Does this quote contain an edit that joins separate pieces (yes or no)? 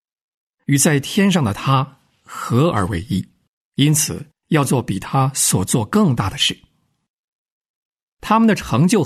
yes